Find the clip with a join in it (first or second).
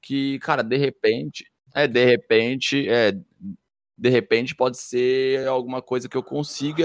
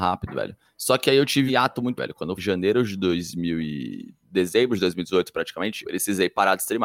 second